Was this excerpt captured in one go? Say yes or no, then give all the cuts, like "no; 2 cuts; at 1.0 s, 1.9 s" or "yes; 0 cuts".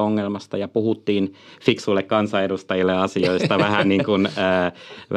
yes; 0 cuts